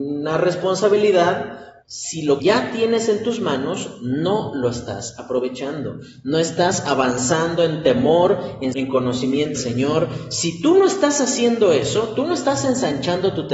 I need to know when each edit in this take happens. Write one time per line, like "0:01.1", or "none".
0:01.8
0:02.4
0:08.7
0:09.5